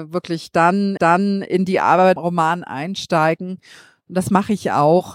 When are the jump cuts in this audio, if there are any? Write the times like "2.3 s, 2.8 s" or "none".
1.0 s, 2.2 s